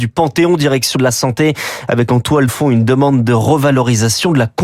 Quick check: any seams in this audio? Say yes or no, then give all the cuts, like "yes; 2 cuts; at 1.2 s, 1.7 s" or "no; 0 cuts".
yes; 2 cuts; at 1.0 s, 2.5 s